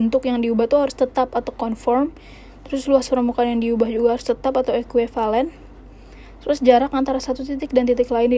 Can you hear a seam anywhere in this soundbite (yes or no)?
no